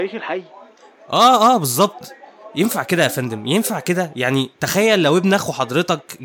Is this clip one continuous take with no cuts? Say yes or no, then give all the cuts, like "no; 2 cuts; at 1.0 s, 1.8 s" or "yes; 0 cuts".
yes; 0 cuts